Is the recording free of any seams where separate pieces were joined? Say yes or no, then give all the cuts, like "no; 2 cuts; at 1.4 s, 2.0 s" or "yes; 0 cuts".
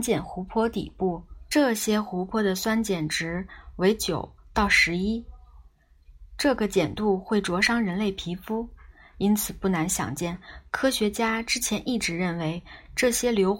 yes; 0 cuts